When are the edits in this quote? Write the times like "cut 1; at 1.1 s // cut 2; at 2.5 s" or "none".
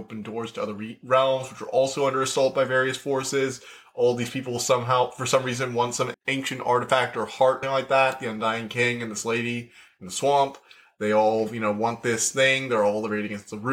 cut 1; at 6.1 s // cut 2; at 7.6 s